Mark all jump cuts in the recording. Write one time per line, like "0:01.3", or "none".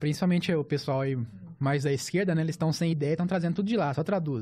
none